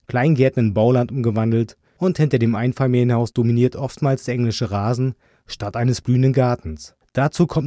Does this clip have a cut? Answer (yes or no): no